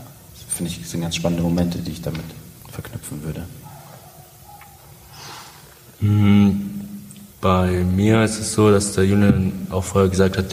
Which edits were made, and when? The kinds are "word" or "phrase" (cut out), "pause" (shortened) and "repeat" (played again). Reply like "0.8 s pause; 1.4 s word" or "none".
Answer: 2.6 s pause; 7.3 s pause